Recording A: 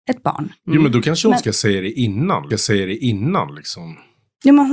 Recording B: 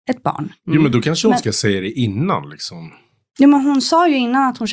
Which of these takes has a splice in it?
A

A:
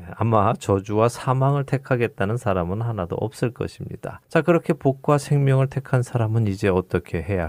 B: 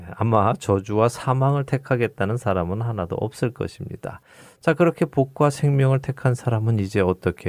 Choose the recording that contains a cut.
A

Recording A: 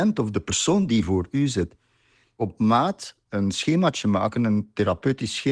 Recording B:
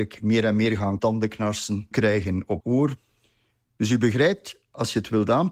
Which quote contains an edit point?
B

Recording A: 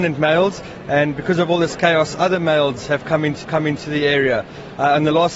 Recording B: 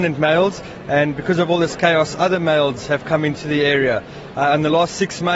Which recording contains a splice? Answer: A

